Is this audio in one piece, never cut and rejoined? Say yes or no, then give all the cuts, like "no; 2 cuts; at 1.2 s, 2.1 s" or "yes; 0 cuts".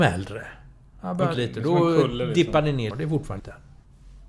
no; 3 cuts; at 1.3 s, 2.9 s, 3.4 s